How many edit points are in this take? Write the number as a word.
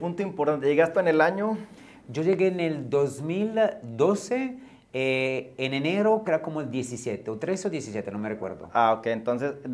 two